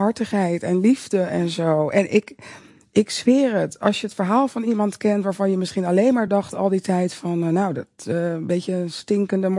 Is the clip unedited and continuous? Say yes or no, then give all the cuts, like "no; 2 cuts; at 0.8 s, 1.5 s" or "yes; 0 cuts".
yes; 0 cuts